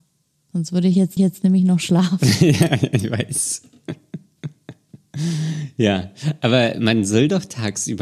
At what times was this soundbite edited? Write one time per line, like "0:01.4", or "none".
0:01.2